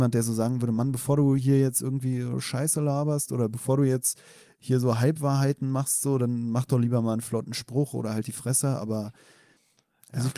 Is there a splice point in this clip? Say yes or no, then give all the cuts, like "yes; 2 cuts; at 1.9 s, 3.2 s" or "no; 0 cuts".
no; 0 cuts